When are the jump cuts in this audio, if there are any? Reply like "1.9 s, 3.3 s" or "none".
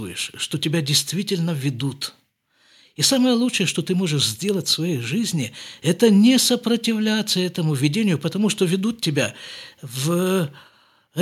none